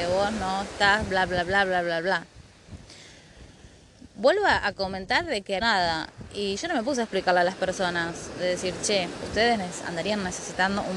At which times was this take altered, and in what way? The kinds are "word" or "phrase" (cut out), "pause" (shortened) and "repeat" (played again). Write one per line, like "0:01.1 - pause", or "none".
0:05.6 - phrase